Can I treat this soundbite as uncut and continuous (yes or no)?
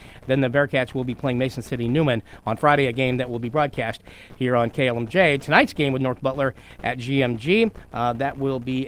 yes